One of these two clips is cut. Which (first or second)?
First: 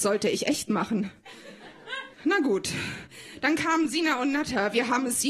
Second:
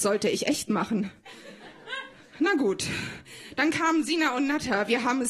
first